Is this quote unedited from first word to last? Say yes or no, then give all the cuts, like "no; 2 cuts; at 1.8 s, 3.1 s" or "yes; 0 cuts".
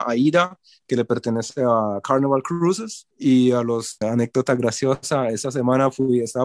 no; 1 cut; at 4.0 s